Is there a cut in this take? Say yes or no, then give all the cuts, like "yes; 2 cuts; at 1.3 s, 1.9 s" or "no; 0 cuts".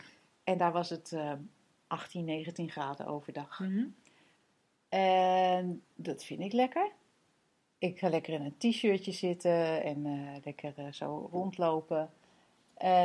no; 0 cuts